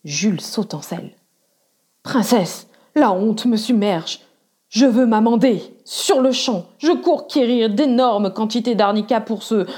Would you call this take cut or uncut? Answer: uncut